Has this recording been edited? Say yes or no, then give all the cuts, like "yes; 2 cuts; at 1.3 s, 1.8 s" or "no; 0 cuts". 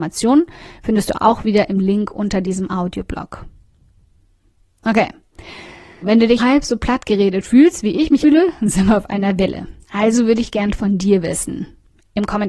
yes; 4 cuts; at 6.0 s, 6.4 s, 8.2 s, 9.8 s